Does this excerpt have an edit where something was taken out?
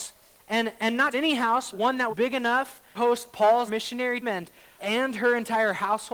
yes; 7 cuts; at 1.1 s, 1.7 s, 2.1 s, 2.9 s, 3.7 s, 4.2 s, 4.8 s

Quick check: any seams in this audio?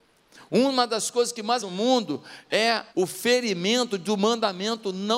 yes; 2 cuts; at 1.6 s, 2.9 s

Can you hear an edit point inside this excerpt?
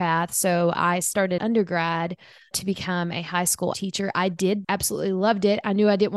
yes; 4 cuts; at 1.4 s, 2.5 s, 3.7 s, 4.6 s

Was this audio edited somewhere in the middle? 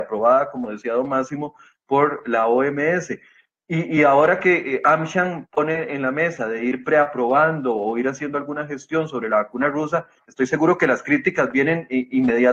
no; 0 cuts

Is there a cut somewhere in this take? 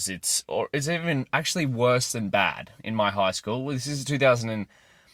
no; 0 cuts

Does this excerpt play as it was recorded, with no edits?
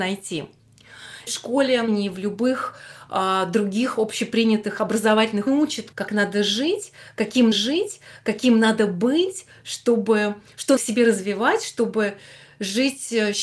no; 6 cuts; at 1.3 s, 1.9 s, 5.5 s, 5.9 s, 7.5 s, 10.8 s

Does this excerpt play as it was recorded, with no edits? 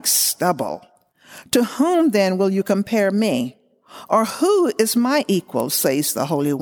yes; 0 cuts

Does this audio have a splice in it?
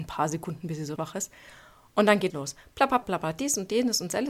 yes; 3 cuts; at 1.0 s, 2.3 s, 3.0 s

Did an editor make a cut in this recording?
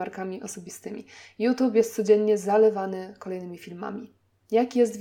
no; 0 cuts

